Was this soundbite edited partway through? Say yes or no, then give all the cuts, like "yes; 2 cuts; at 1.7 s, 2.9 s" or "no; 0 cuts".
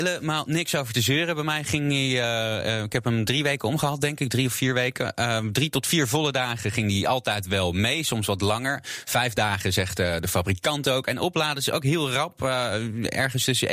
no; 0 cuts